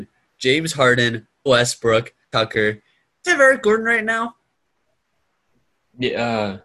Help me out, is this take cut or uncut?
cut